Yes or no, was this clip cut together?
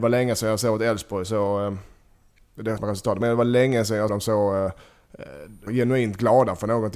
yes